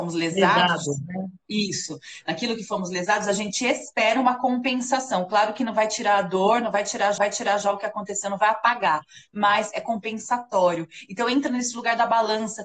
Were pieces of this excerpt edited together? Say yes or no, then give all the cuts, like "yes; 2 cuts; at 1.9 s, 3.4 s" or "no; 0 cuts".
yes; 1 cut; at 7.2 s